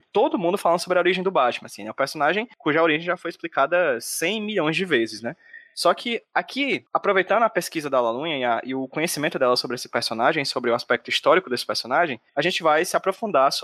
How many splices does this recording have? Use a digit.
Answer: 1